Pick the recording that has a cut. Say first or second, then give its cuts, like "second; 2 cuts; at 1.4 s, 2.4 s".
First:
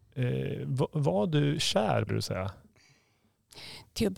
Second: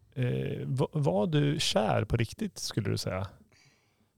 first; 1 cut; at 2.1 s